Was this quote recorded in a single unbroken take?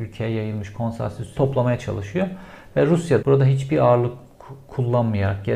no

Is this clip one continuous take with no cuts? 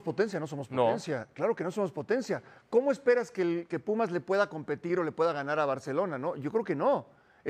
yes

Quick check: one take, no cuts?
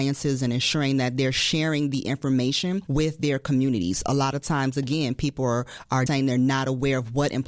no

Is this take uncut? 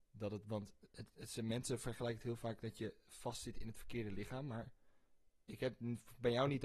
yes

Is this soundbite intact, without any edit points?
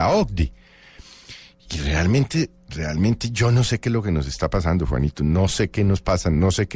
yes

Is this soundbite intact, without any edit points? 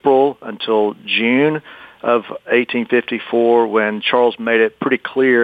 yes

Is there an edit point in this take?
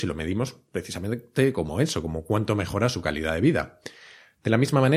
no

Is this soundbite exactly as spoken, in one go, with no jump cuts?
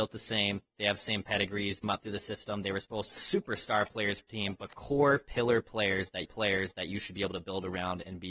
no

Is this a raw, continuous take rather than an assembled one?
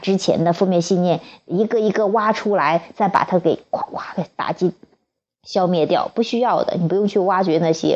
yes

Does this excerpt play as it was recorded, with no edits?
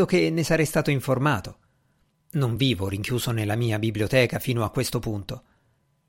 yes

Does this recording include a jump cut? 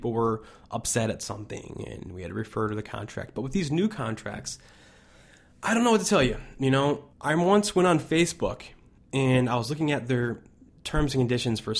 yes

